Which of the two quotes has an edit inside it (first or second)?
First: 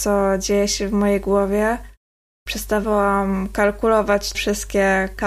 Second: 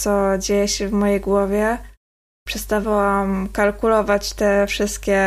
first